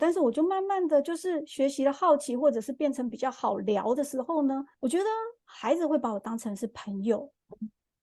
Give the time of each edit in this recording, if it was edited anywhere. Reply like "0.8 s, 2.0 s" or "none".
4.7 s

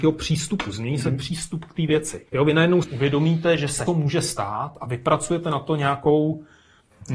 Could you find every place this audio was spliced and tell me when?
2.3 s, 2.8 s, 3.9 s

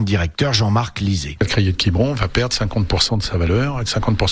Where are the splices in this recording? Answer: none

